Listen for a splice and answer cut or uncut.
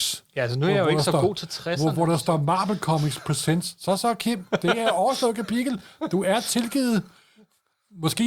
uncut